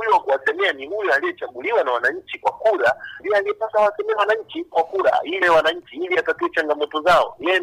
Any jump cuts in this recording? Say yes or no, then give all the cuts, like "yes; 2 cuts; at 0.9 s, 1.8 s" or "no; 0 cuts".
yes; 3 cuts; at 3.2 s, 4.7 s, 5.4 s